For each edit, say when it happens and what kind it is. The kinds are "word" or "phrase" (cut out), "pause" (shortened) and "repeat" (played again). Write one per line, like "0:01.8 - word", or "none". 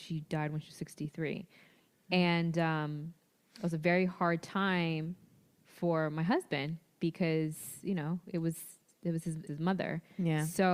0:09.5 - word